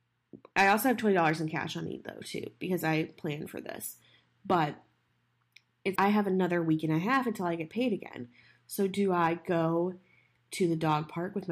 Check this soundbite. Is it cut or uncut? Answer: cut